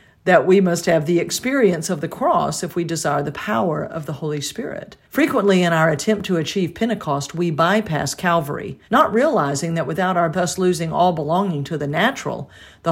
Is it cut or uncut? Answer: cut